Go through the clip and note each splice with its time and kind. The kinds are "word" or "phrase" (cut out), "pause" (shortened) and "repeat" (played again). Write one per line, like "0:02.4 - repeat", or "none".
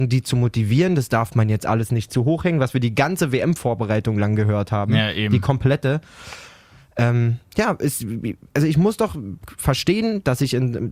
none